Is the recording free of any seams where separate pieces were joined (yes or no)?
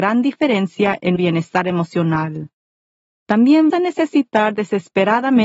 no